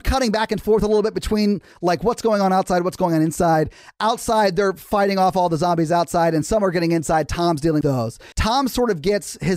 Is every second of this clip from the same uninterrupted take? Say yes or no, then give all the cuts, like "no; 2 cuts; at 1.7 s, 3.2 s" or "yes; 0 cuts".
no; 2 cuts; at 7.8 s, 8.3 s